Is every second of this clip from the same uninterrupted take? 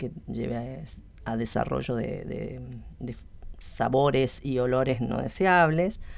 yes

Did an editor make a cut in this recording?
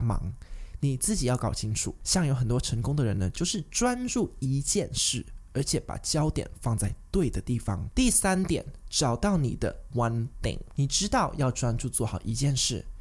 yes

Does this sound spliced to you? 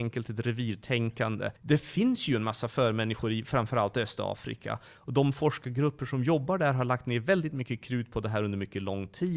yes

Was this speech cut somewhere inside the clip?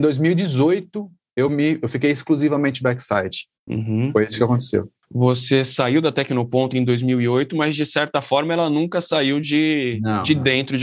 no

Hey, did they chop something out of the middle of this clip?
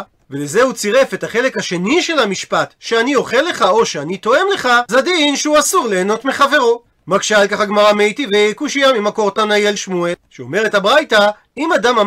yes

